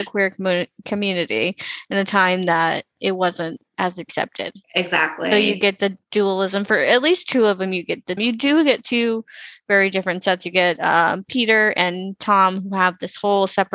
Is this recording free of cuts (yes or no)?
no